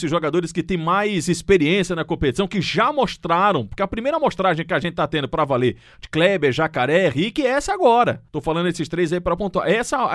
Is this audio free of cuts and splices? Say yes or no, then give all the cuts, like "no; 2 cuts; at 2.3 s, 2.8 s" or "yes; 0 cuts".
no; 1 cut; at 8.3 s